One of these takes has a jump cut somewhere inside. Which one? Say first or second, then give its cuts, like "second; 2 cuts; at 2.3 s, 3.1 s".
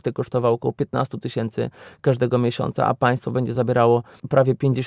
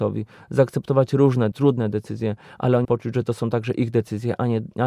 second; 2 cuts; at 1.5 s, 2.8 s